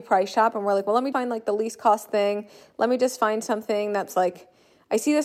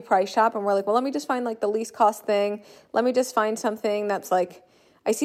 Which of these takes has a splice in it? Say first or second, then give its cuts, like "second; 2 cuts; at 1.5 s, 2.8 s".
first; 1 cut; at 1.1 s